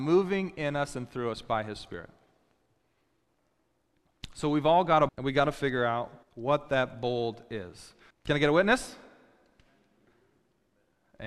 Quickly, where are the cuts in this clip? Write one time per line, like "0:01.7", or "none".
0:05.1
0:06.2
0:08.1